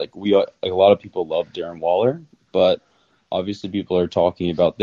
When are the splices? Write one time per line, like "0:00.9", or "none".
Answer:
none